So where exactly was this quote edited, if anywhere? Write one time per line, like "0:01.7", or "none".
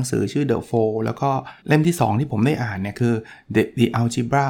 0:01.6